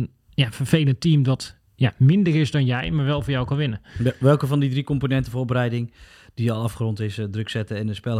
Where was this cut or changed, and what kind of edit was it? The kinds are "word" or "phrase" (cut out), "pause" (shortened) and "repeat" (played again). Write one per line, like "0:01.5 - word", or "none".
none